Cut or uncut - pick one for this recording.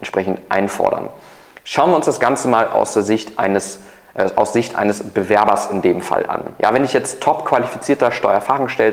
uncut